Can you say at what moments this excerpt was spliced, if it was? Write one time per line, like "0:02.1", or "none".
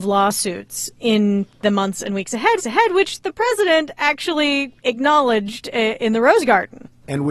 0:02.6